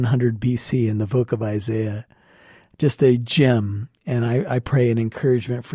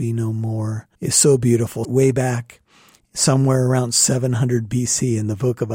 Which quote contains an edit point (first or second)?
second